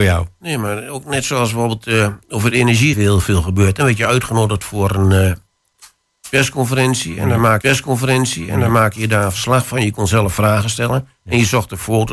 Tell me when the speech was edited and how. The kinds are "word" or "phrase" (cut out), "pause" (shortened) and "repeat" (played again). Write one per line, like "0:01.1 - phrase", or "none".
0:02.9 - phrase
0:07.6 - repeat